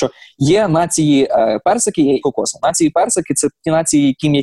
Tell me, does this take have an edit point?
yes; 1 cut; at 2.2 s

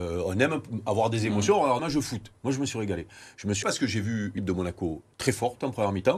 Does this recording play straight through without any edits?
no; 3 cuts; at 1.8 s, 3.6 s, 4.4 s

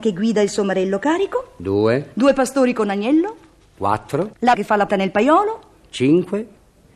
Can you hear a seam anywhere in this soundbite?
yes; 2 cuts; at 4.5 s, 4.9 s

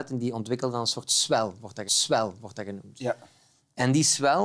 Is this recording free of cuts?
no; 1 cut; at 1.9 s

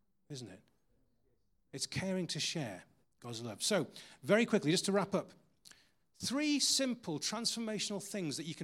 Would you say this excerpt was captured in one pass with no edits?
no; 1 cut; at 3.0 s

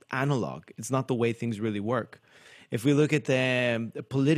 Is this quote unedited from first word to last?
yes; 0 cuts

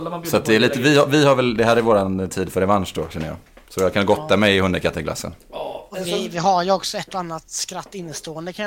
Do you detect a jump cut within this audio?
no; 0 cuts

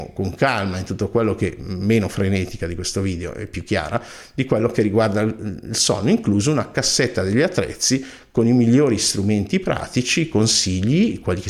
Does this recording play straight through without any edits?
yes; 0 cuts

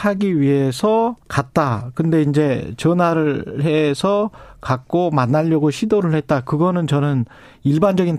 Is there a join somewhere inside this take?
yes; 1 cut; at 1.2 s

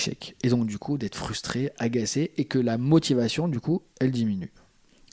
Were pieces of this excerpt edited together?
yes; 1 cut; at 3.9 s

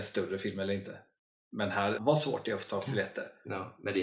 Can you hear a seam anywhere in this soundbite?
yes; 1 cut; at 2.0 s

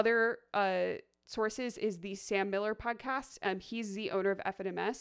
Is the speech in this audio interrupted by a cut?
no; 0 cuts

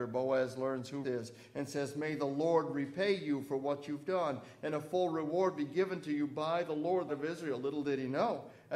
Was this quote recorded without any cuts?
no; 2 cuts; at 1.0 s, 7.1 s

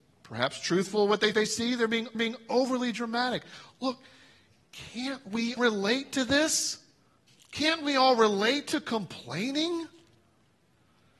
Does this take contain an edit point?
yes; 4 cuts; at 1.3 s, 2.1 s, 5.6 s, 7.3 s

